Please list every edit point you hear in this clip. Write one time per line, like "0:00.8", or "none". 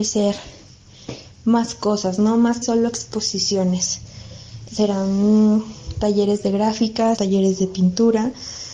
0:02.6
0:04.7
0:07.2

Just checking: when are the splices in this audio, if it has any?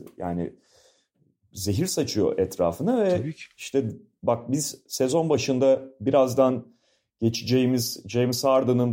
none

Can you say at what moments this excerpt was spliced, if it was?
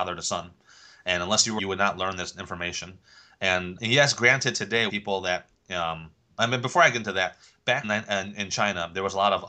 0:01.6
0:03.8
0:04.9
0:06.4
0:07.8

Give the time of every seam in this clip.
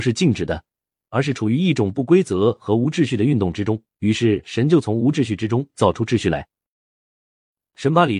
0:03.9

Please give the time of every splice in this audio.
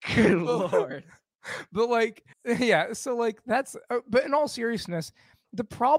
0:02.3

